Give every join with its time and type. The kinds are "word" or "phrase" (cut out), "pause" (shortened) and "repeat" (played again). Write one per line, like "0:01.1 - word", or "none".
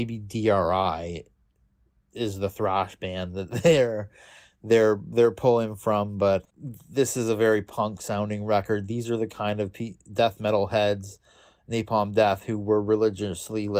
none